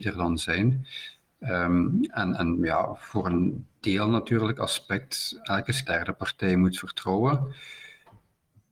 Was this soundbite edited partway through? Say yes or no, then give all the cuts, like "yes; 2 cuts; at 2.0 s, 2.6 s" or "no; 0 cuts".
yes; 1 cut; at 5.9 s